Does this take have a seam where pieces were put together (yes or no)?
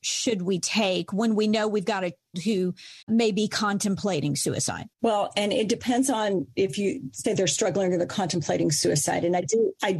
yes